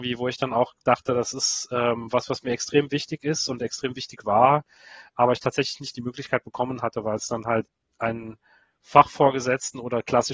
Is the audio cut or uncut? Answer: uncut